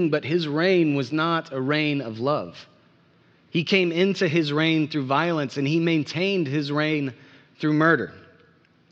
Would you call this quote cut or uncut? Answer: uncut